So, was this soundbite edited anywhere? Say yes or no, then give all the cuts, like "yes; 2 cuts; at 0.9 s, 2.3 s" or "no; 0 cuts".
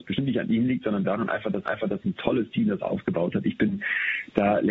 yes; 1 cut; at 1.7 s